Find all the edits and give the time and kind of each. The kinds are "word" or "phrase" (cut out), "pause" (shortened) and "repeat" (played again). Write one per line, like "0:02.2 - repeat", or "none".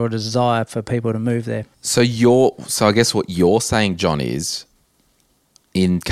0:01.7 - pause